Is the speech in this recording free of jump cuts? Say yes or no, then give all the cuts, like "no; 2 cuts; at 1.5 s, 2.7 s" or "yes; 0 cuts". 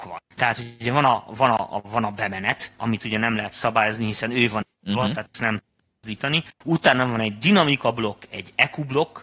no; 2 cuts; at 4.7 s, 6.5 s